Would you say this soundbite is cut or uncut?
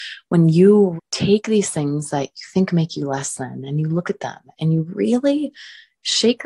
cut